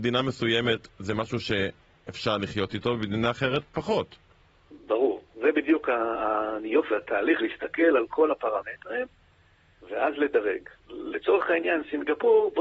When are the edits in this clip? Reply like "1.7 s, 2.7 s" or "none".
5.3 s, 6.9 s, 7.4 s